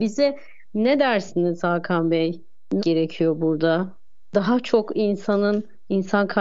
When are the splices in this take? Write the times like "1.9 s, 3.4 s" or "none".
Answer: 2.8 s